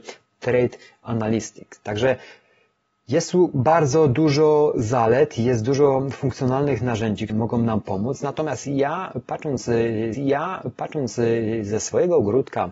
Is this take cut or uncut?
cut